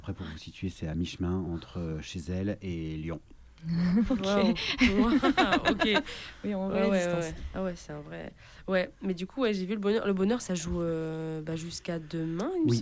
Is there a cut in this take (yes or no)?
no